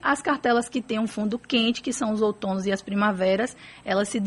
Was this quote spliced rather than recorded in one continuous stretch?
no; 0 cuts

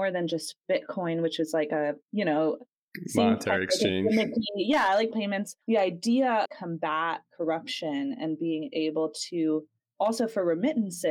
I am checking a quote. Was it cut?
yes; 4 cuts; at 2.0 s, 5.1 s, 5.6 s, 6.4 s

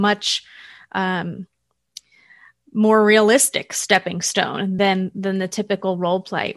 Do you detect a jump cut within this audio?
no; 0 cuts

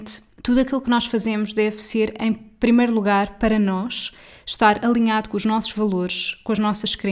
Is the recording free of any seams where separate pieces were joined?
yes; 0 cuts

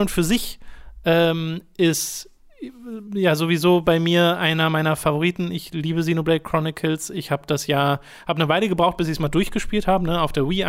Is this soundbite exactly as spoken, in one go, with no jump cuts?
yes; 0 cuts

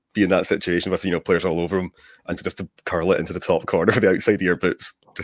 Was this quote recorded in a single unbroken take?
no; 1 cut; at 2.4 s

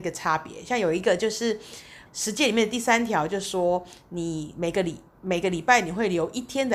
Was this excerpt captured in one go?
no; 1 cut; at 2.1 s

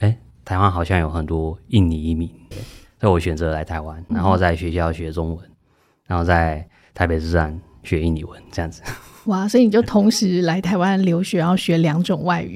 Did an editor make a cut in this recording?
yes; 2 cuts; at 2.5 s, 4.1 s

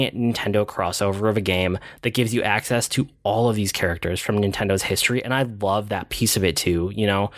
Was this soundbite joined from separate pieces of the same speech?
no; 0 cuts

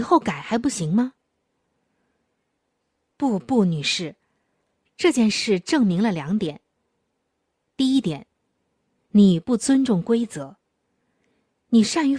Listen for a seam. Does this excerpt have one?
no; 0 cuts

